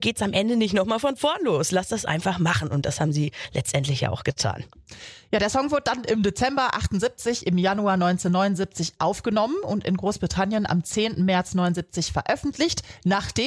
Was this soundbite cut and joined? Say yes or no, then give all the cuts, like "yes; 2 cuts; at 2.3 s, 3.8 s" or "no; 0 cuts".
no; 0 cuts